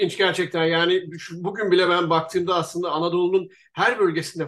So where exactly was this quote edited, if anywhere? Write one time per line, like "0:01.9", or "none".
none